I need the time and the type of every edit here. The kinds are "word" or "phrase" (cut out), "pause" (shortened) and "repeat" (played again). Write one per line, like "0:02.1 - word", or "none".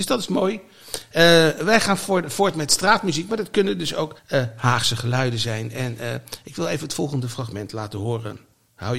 0:04.2 - pause